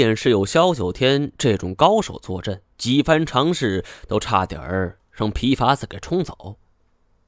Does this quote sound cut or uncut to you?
cut